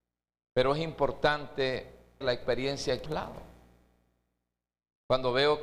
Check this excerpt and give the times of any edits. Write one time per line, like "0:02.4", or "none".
0:02.2
0:03.1

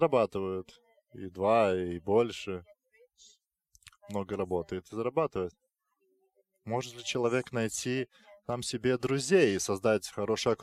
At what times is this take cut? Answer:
none

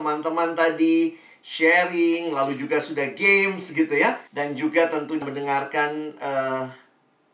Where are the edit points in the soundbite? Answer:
0:04.3
0:05.2

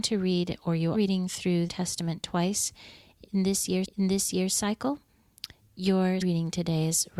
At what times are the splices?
0:00.9
0:01.7
0:03.8
0:06.2

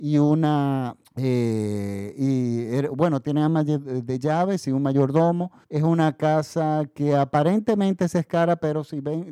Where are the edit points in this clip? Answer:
0:01.0
0:05.6

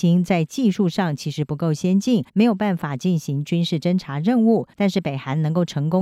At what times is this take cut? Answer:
0:02.3
0:04.7

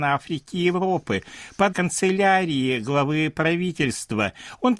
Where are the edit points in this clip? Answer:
0:01.7

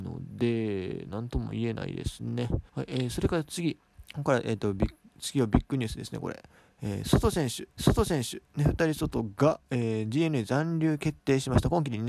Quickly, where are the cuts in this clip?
0:02.7
0:04.0
0:07.8

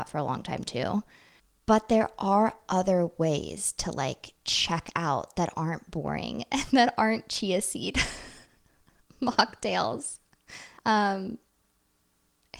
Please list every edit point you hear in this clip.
0:01.4
0:08.5
0:10.8

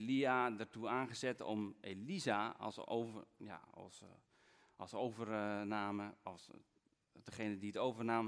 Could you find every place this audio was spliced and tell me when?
none

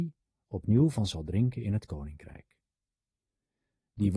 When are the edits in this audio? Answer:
none

